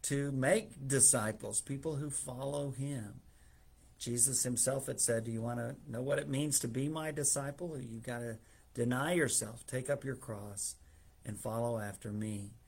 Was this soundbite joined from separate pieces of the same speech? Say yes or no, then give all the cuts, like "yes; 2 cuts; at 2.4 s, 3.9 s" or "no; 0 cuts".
no; 0 cuts